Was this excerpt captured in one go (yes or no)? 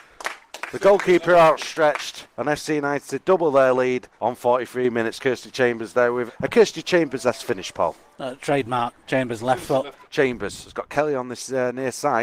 no